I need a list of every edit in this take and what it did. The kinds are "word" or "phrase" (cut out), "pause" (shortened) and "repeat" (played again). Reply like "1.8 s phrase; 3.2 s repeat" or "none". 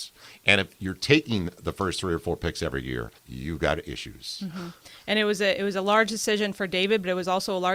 3.2 s pause